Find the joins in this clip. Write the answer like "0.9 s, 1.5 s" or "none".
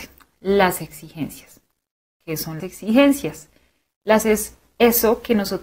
2.6 s, 4.2 s